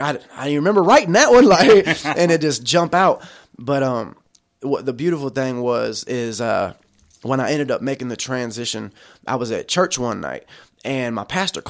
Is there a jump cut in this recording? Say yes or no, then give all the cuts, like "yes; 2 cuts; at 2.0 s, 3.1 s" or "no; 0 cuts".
no; 0 cuts